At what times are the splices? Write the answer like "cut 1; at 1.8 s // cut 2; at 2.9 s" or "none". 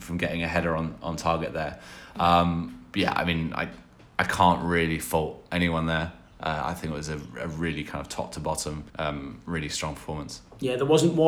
cut 1; at 8.9 s